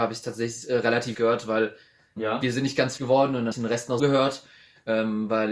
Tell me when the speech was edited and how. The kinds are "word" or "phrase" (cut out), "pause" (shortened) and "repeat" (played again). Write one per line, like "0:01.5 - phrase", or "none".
0:01.1 - word
0:02.2 - word
0:03.0 - word
0:03.5 - word
0:04.0 - word